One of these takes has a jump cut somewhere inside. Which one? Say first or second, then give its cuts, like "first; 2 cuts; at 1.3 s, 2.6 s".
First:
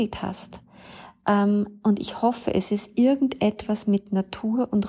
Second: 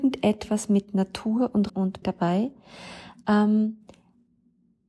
second; 2 cuts; at 1.7 s, 2.0 s